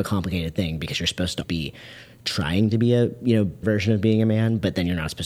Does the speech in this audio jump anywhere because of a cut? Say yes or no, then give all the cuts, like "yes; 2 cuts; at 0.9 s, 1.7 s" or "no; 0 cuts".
yes; 2 cuts; at 1.4 s, 3.6 s